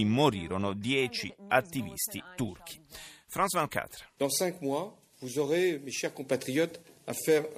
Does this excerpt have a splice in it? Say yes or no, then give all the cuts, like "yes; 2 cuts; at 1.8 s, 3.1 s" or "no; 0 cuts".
no; 0 cuts